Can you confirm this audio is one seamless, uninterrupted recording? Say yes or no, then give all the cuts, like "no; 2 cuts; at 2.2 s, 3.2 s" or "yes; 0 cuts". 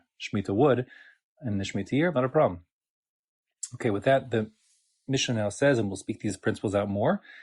no; 1 cut; at 2.1 s